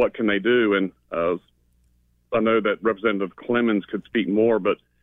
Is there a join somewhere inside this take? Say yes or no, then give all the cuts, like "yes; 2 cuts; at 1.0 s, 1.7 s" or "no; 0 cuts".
no; 0 cuts